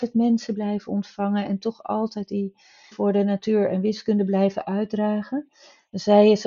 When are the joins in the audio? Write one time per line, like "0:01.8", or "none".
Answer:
0:02.9